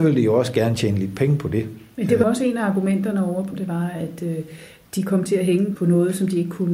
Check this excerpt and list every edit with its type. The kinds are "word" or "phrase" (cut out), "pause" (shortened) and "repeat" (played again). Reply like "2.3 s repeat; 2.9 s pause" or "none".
2.2 s word; 3.5 s word; 5.8 s word